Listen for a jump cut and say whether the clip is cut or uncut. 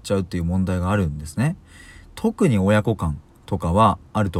uncut